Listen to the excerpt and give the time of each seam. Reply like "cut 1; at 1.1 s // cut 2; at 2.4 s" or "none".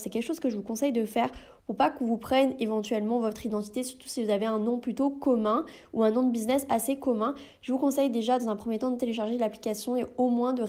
none